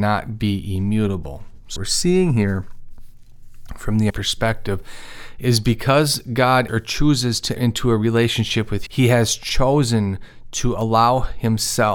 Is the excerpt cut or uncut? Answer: cut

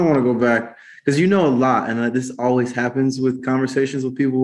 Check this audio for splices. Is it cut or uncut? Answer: uncut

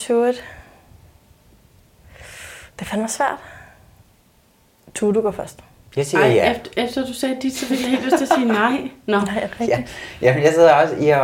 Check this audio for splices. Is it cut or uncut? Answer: uncut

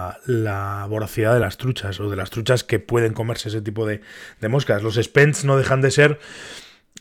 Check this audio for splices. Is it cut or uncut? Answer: uncut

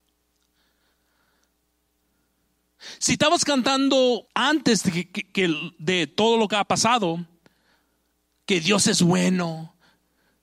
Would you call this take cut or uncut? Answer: cut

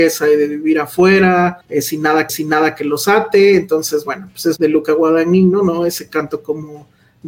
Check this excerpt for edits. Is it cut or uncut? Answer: cut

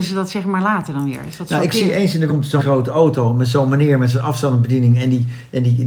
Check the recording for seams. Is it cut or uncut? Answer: cut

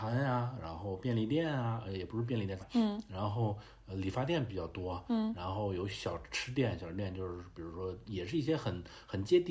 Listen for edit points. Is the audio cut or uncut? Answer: cut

